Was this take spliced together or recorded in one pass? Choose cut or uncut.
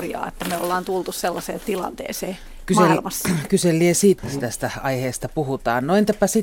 cut